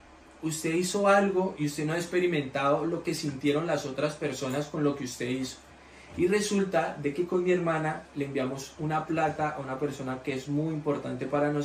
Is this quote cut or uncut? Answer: uncut